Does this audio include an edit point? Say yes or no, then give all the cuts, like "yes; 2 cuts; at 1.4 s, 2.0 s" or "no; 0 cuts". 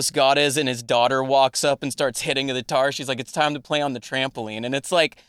no; 0 cuts